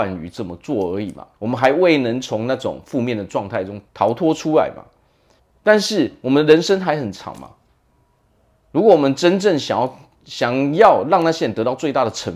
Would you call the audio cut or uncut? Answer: cut